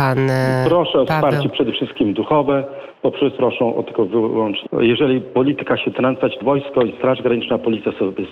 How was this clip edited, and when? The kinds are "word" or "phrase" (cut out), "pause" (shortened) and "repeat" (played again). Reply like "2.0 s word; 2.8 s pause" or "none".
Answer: 3.4 s word; 4.6 s word; 5.9 s phrase; 6.4 s word